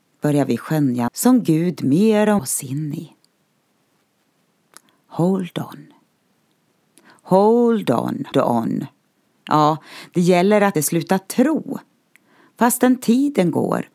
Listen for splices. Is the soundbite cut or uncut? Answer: cut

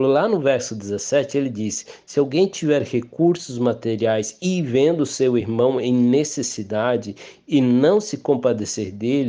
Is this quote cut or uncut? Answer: uncut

